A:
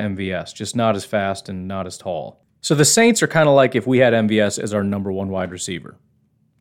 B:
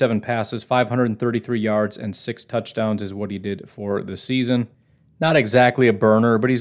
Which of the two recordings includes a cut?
A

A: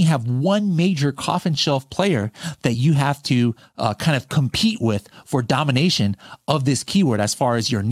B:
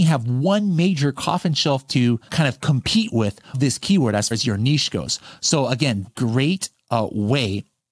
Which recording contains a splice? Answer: B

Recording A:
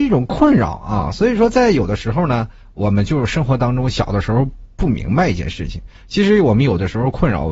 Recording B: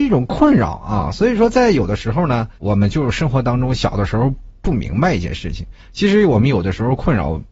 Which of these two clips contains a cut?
B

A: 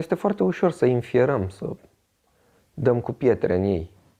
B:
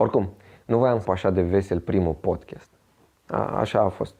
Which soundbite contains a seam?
B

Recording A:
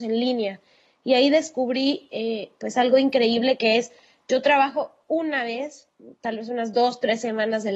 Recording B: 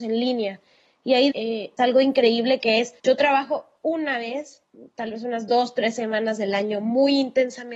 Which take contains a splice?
B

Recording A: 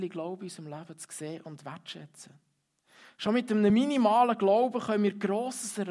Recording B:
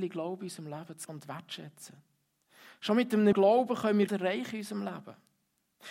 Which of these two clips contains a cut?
B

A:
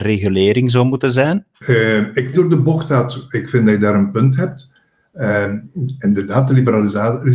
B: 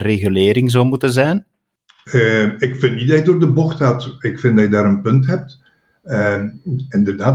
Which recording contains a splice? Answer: A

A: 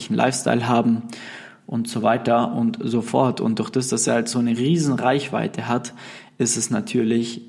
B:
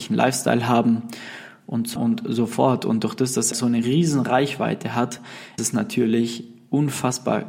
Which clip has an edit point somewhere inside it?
B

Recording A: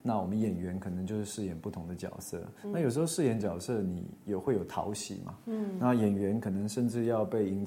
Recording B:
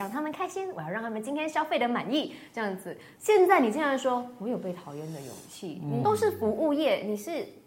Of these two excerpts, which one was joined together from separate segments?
B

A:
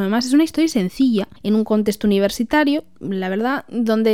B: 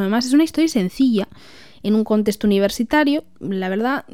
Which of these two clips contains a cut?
A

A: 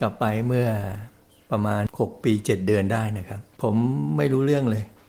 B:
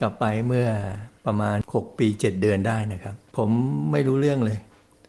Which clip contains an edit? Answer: B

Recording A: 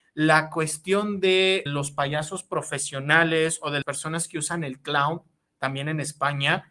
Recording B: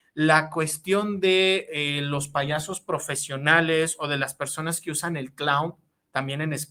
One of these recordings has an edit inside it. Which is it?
A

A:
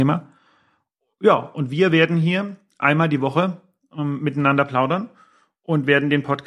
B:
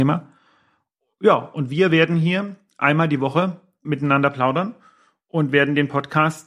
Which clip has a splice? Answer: B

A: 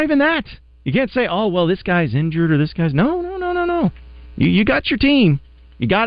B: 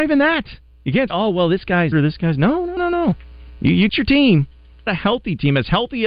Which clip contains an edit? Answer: B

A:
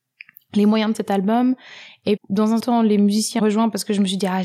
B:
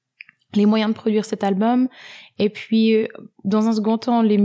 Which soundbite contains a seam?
A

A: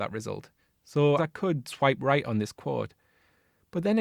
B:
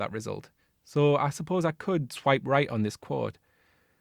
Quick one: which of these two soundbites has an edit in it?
A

